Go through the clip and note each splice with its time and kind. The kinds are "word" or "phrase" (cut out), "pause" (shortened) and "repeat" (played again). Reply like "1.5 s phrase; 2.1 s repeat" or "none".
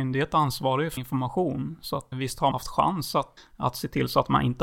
1.0 s word; 2.1 s word; 2.5 s word; 3.4 s word